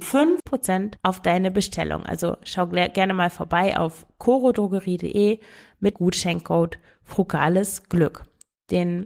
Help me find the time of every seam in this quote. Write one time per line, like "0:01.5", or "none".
0:05.9

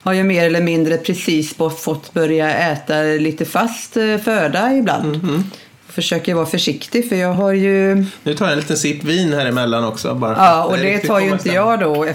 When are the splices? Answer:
none

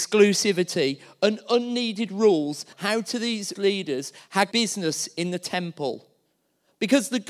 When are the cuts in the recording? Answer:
0:02.7
0:03.6
0:04.5

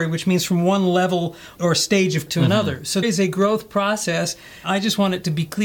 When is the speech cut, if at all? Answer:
0:01.6
0:02.3
0:03.0
0:04.6

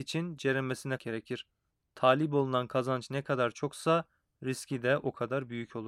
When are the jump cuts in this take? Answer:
0:01.0

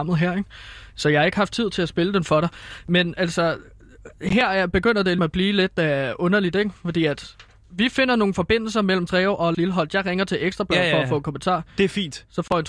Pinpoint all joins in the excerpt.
0:05.2
0:09.1
0:09.5

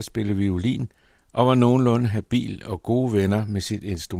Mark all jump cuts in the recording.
none

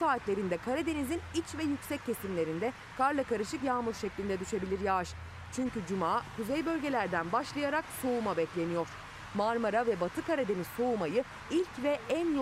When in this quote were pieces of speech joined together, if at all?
none

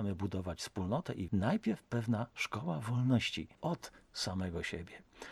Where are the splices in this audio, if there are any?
0:01.3
0:03.5

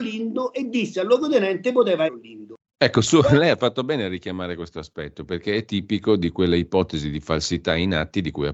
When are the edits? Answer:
0:02.1

